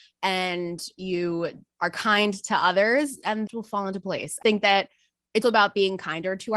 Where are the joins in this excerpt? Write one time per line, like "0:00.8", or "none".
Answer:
0:03.5
0:04.4
0:05.4